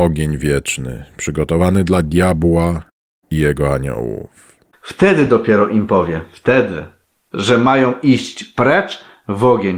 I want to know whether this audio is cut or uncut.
uncut